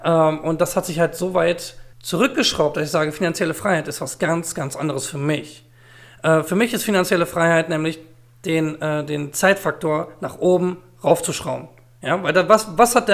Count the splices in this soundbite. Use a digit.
1